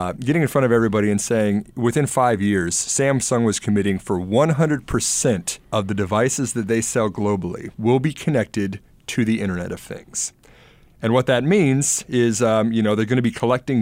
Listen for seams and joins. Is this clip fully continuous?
no; 2 cuts; at 5.6 s, 7.7 s

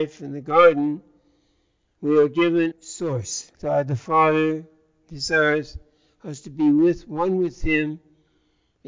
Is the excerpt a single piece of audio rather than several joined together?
no; 2 cuts; at 2.7 s, 3.5 s

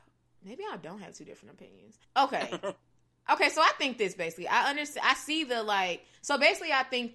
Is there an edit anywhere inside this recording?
yes; 2 cuts; at 2.0 s, 6.2 s

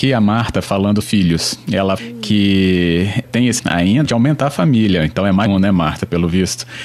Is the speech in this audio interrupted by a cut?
yes; 6 cuts; at 1.0 s, 2.0 s, 3.2 s, 3.6 s, 4.0 s, 5.5 s

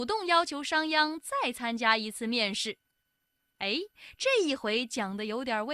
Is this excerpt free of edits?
yes; 0 cuts

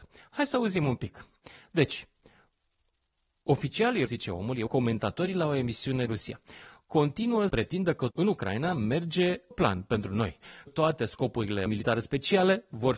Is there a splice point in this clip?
yes; 8 cuts; at 4.1 s, 4.7 s, 6.1 s, 7.5 s, 8.1 s, 9.5 s, 10.7 s, 11.7 s

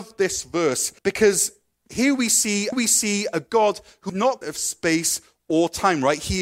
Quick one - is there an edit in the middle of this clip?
yes; 4 cuts; at 1.0 s, 2.7 s, 4.1 s, 4.4 s

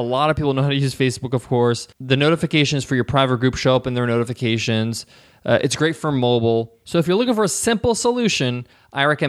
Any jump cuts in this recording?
yes; 1 cut; at 1.9 s

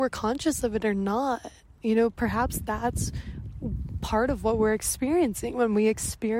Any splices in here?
no; 0 cuts

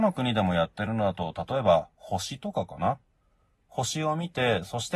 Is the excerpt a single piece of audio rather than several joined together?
yes; 0 cuts

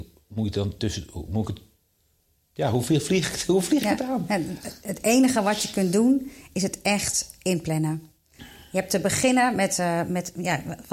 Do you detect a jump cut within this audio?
no; 0 cuts

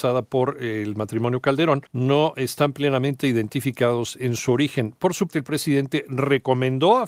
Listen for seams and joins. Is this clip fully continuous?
no; 2 cuts; at 1.9 s, 5.3 s

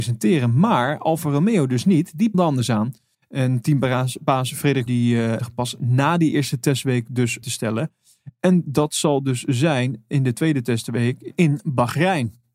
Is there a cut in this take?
yes; 5 cuts; at 2.3 s, 3.1 s, 4.9 s, 5.4 s, 7.4 s

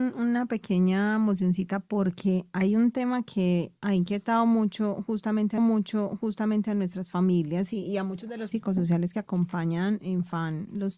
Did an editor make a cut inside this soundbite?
yes; 2 cuts; at 5.6 s, 8.5 s

